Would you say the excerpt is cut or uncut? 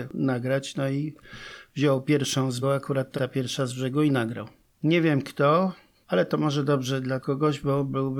cut